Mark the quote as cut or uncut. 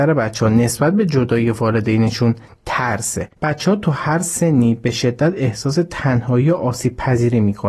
cut